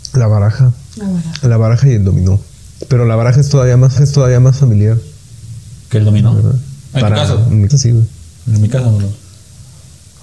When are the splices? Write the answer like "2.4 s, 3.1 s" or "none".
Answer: 4.0 s, 7.7 s